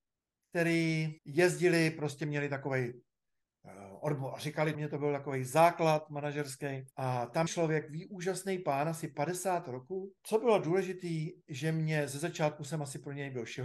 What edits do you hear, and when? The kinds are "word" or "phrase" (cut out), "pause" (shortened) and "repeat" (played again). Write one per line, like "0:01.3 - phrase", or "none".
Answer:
0:01.2 - pause
0:04.7 - phrase
0:06.9 - pause
0:07.5 - word
0:10.2 - pause